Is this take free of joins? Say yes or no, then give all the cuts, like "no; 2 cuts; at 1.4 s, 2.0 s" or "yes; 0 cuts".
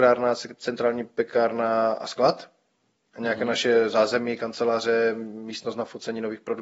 yes; 0 cuts